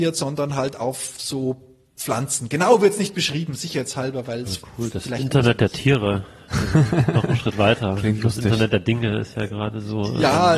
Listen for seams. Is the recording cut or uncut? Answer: uncut